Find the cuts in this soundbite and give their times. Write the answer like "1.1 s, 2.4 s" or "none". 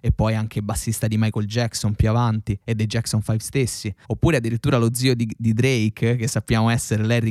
4.0 s